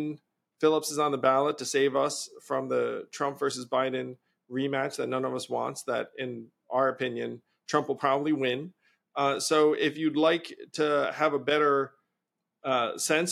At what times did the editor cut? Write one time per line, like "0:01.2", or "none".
none